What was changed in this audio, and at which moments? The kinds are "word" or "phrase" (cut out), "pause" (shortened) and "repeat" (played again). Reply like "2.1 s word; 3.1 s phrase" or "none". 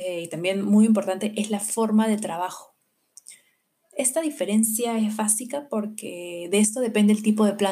none